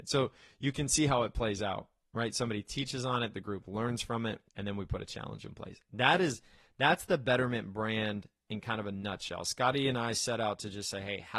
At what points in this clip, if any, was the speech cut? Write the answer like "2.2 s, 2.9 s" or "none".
4.5 s